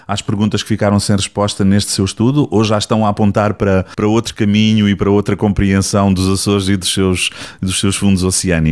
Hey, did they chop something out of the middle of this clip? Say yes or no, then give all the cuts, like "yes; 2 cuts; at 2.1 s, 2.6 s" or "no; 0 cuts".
no; 0 cuts